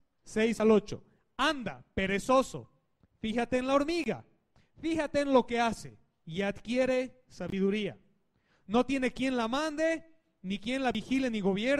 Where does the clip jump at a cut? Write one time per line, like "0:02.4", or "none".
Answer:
none

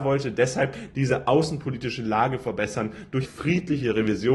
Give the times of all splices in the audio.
0:03.2

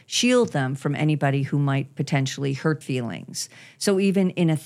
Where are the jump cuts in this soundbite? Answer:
0:02.8

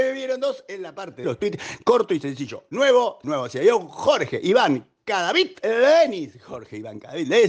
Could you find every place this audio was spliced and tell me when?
0:01.2
0:03.2

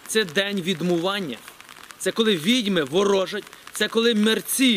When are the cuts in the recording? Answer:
none

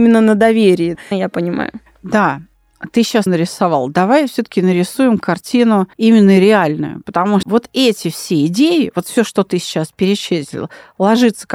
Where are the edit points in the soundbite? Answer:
0:01.1
0:03.3
0:05.9
0:07.4

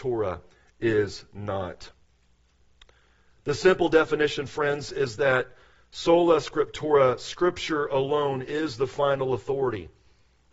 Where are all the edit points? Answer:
none

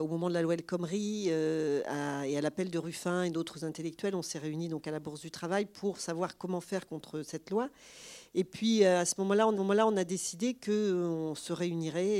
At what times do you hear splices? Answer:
0:09.5

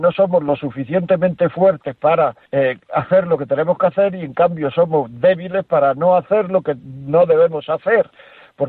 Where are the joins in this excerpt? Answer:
0:02.5

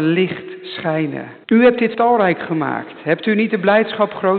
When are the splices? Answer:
0:01.4
0:01.9

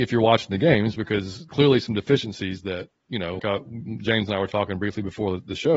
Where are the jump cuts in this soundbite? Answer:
0:01.5
0:03.4

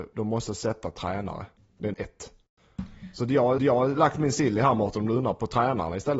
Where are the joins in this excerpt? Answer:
0:01.9
0:03.6

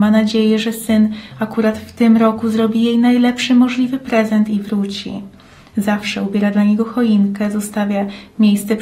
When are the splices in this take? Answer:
none

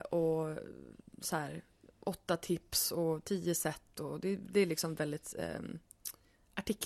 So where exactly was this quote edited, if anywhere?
none

